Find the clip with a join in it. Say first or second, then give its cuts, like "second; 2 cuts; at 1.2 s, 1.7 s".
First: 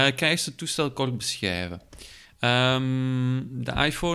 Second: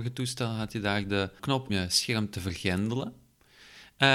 second; 2 cuts; at 1.4 s, 1.7 s